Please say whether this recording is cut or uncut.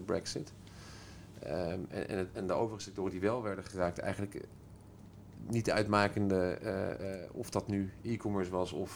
uncut